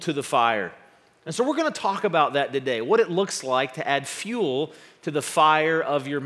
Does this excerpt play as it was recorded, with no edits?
yes; 0 cuts

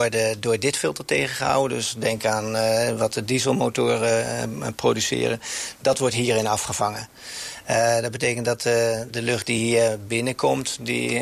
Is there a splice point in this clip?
no; 0 cuts

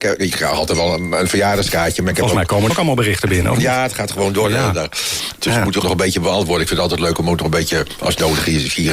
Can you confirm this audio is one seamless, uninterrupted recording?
no; 2 cuts; at 2.7 s, 5.8 s

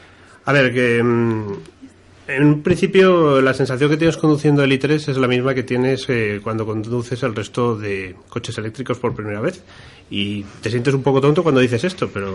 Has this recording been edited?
no; 0 cuts

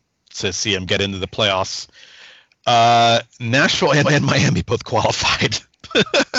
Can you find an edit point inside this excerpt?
yes; 1 cut; at 4.0 s

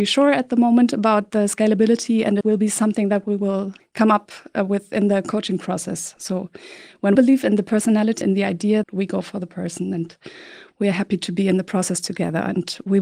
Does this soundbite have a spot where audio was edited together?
yes; 5 cuts; at 2.4 s, 3.8 s, 7.2 s, 8.2 s, 8.8 s

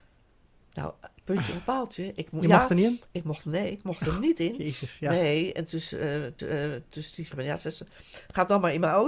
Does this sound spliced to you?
yes; 3 cuts; at 3.4 s, 6.4 s, 7.3 s

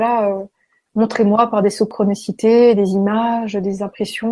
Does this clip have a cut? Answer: no; 0 cuts

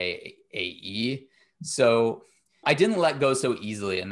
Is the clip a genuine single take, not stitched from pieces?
no; 1 cut; at 2.6 s

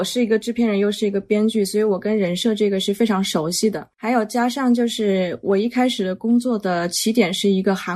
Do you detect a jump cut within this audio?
yes; 1 cut; at 3.9 s

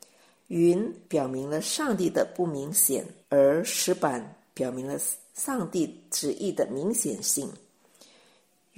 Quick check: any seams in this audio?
yes; 2 cuts; at 1.0 s, 3.2 s

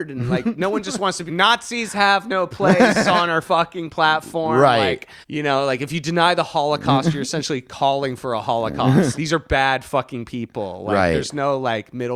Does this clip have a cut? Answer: yes; 3 cuts; at 1.3 s, 5.2 s, 9.1 s

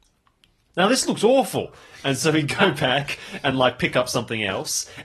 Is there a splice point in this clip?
no; 0 cuts

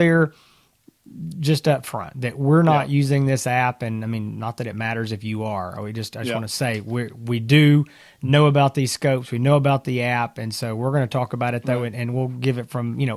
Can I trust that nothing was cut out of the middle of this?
yes; 0 cuts

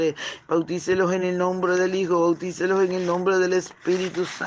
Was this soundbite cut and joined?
no; 0 cuts

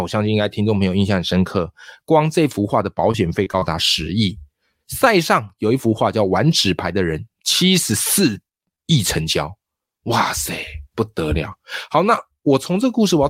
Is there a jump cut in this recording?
no; 0 cuts

